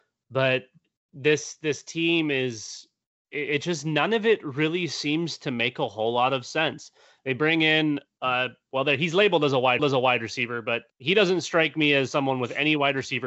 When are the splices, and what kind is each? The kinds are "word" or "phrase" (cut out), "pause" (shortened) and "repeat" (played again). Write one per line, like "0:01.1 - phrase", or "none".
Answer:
0:09.8 - repeat
0:10.9 - pause